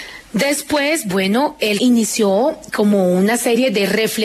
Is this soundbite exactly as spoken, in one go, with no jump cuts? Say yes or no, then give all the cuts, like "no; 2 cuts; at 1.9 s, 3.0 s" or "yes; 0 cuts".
no; 1 cut; at 1.8 s